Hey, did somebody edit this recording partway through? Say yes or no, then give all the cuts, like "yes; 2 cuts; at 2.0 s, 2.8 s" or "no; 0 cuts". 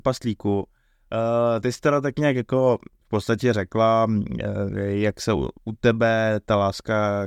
yes; 1 cut; at 5.6 s